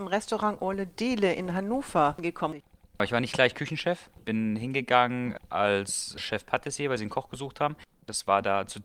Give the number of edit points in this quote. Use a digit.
0